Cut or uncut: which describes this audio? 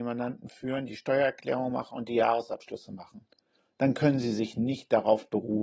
uncut